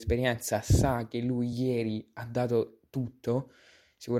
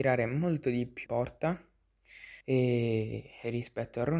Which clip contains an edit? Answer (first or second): second